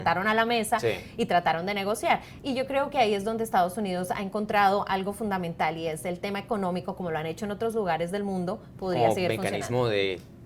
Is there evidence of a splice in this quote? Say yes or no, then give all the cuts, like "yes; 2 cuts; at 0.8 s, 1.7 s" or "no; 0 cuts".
no; 0 cuts